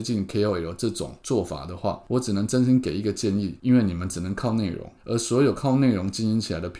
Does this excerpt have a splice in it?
yes; 1 cut; at 5.0 s

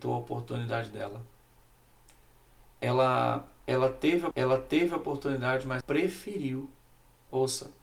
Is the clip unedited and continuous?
no; 2 cuts; at 4.3 s, 5.8 s

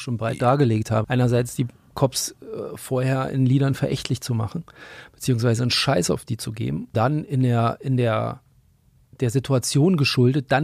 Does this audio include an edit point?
yes; 2 cuts; at 1.0 s, 6.9 s

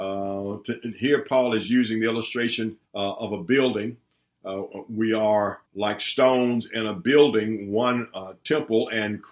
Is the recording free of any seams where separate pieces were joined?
no; 2 cuts; at 2.9 s, 5.7 s

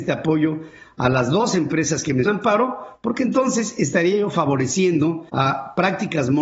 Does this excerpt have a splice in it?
yes; 2 cuts; at 2.3 s, 5.3 s

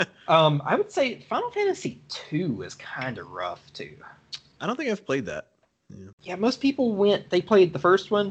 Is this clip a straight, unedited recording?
no; 1 cut; at 6.1 s

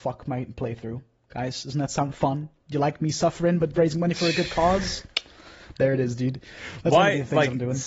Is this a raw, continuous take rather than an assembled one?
yes; 0 cuts

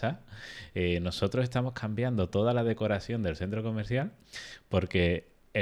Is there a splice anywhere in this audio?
no; 0 cuts

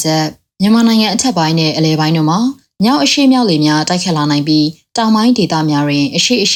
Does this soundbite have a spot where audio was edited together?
no; 0 cuts

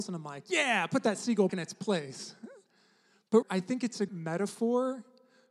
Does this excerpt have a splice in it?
yes; 3 cuts; at 1.5 s, 3.4 s, 4.1 s

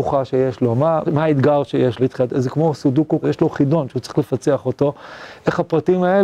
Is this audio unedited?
no; 3 cuts; at 1.0 s, 2.0 s, 3.2 s

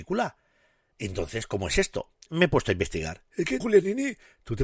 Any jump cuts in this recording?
yes; 2 cuts; at 2.3 s, 3.6 s

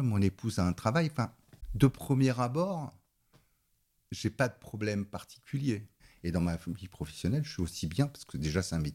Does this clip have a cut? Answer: no; 0 cuts

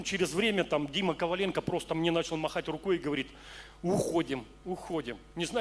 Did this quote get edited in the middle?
no; 0 cuts

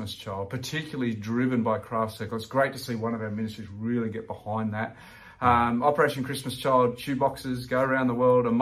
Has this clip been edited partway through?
no; 0 cuts

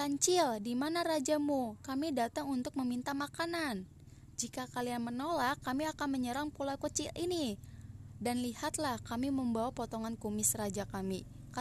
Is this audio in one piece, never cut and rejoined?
yes; 0 cuts

